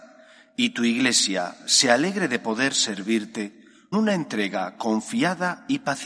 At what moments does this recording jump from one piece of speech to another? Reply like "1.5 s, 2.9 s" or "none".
3.9 s